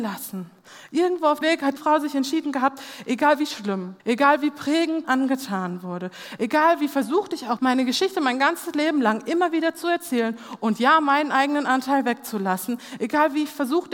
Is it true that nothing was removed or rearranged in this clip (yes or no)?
no